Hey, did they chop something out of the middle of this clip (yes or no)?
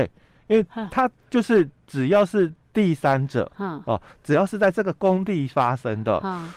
yes